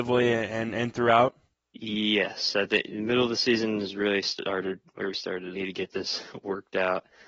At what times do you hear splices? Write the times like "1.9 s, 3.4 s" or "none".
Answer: 1.5 s, 4.9 s, 5.5 s